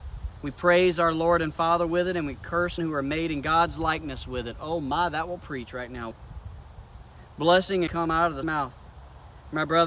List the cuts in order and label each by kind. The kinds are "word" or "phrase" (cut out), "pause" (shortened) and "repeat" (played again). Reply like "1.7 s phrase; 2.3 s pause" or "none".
2.8 s word; 6.1 s word; 7.9 s phrase; 8.4 s word